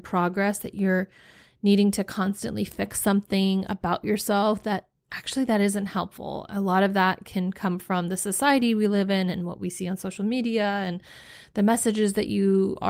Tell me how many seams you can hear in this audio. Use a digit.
0